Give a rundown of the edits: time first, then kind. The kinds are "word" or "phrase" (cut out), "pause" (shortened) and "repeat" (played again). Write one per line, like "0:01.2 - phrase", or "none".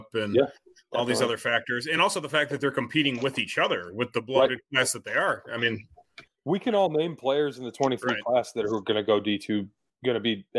none